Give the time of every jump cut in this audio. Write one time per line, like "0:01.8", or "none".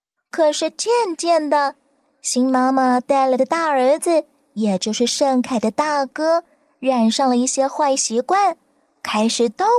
none